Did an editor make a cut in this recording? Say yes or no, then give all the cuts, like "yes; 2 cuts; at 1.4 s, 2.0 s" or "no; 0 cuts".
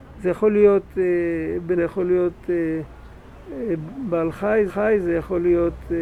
yes; 2 cuts; at 1.8 s, 4.7 s